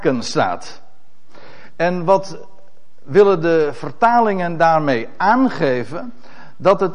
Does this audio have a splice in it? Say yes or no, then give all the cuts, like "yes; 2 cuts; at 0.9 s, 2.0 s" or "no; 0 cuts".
no; 0 cuts